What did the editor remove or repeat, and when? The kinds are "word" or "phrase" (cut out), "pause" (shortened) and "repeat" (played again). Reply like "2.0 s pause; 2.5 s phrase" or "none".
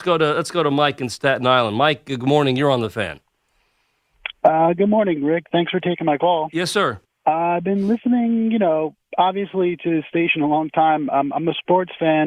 7.0 s pause

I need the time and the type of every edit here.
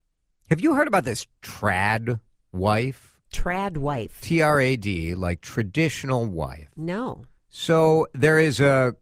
3.2 s pause; 7.4 s pause

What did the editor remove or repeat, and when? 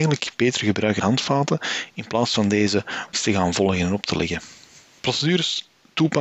1.0 s word; 3.1 s word

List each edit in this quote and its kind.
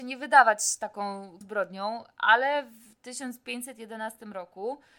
1.4 s word

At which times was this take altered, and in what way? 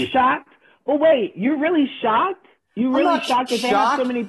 2.6 s pause

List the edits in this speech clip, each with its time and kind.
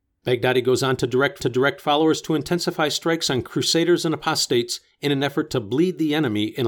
1.4 s repeat

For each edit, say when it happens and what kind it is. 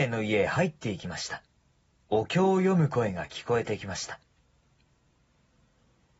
1.6 s pause

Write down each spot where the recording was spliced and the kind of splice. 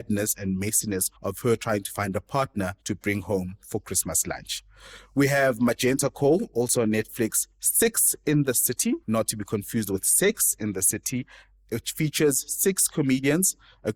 1.2 s pause; 2.8 s pause; 9.0 s pause

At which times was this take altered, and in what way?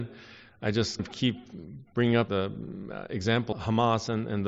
1.0 s word; 2.3 s word; 3.5 s word

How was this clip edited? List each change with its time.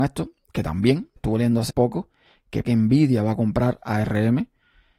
1.2 s word; 1.7 s word; 2.6 s word

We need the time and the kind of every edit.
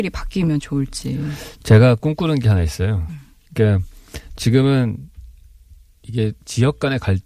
none

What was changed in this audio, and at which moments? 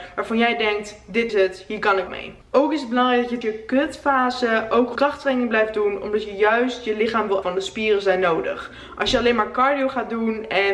1.3 s word; 2.1 s word; 3.4 s word; 5.0 s word; 7.4 s word

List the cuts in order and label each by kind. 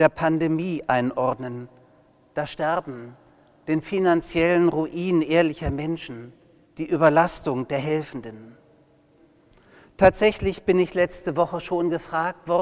6.6 s pause

